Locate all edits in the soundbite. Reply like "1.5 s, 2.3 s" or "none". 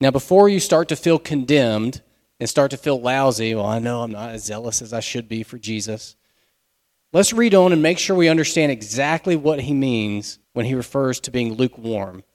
10.4 s

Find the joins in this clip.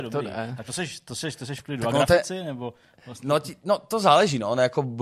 none

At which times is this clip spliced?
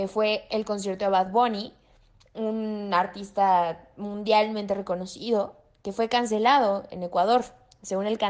none

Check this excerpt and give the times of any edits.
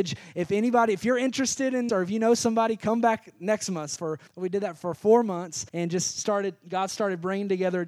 1.9 s, 4.0 s, 4.3 s, 5.7 s

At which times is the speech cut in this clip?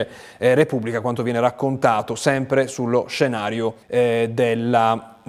3.8 s

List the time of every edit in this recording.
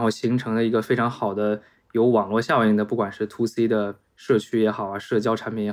none

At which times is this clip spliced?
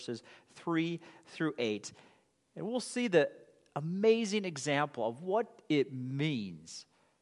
none

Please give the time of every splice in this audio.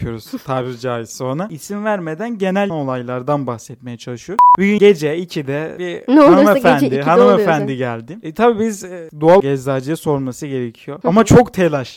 2.7 s, 4.8 s, 9.4 s

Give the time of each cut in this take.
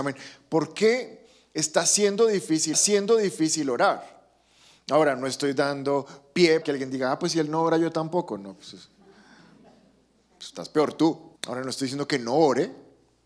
2.7 s, 6.6 s, 11.4 s

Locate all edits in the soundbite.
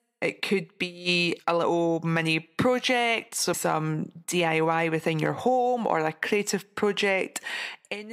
1.4 s, 3.5 s

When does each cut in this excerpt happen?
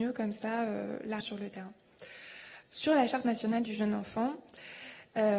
1.2 s, 3.6 s

